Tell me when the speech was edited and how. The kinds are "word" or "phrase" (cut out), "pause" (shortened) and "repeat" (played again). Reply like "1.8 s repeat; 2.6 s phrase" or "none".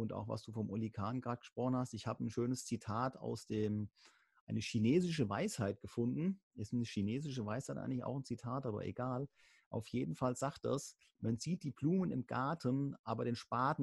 none

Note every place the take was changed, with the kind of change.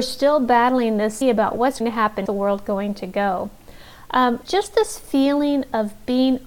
1.2 s word; 1.8 s word; 2.3 s phrase; 4.4 s word

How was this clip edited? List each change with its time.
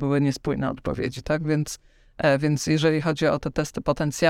none

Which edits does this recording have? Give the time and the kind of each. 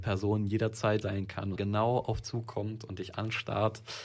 1.0 s word; 1.5 s phrase; 2.2 s word

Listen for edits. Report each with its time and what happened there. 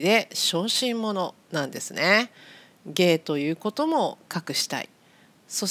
none

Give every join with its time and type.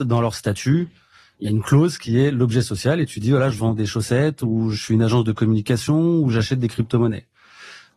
none

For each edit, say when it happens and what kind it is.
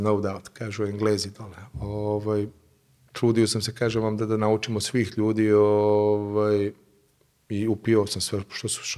none

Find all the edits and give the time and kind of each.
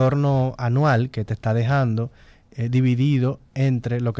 none

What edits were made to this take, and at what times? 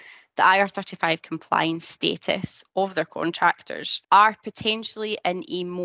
4.0 s pause

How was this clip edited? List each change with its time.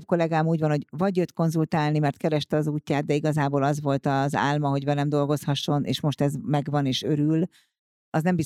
none

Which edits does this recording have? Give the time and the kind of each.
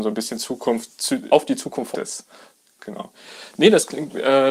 1.3 s word; 1.9 s word

